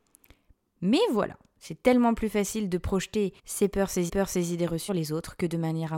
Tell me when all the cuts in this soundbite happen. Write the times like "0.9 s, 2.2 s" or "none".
3.4 s, 4.1 s, 4.9 s